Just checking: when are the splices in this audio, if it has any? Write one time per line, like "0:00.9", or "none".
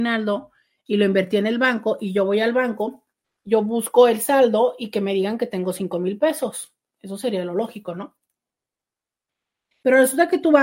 0:03.2